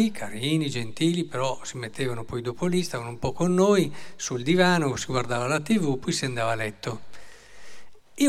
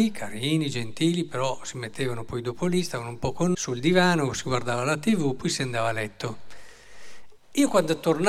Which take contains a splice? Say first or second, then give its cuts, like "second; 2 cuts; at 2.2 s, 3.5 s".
second; 1 cut; at 3.5 s